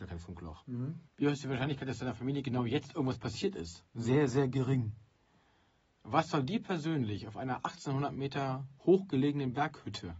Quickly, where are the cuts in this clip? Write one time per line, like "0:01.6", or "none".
0:01.1
0:03.9
0:08.8